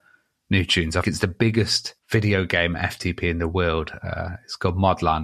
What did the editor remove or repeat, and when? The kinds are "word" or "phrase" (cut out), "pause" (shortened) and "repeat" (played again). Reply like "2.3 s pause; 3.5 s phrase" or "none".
1.0 s word; 2.0 s pause